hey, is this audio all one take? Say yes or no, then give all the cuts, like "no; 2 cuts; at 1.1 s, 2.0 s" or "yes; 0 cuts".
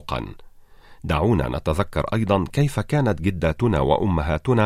yes; 0 cuts